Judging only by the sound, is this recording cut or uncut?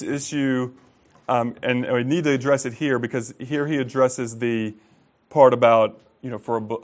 uncut